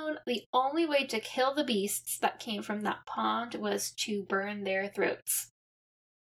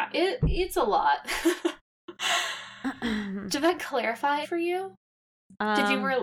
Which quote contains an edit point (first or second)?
second